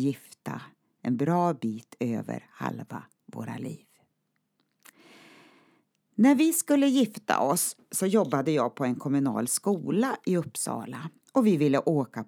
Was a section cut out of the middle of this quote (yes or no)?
no